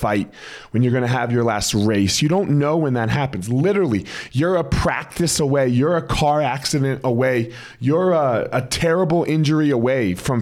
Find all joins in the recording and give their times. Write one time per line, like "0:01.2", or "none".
none